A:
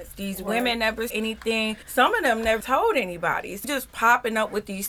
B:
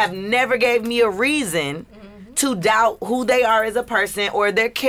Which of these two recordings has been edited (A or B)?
A